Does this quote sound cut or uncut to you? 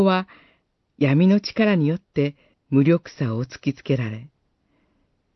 cut